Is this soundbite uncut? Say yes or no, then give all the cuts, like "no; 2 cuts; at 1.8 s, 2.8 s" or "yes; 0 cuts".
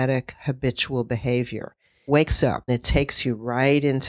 no; 2 cuts; at 2.1 s, 2.7 s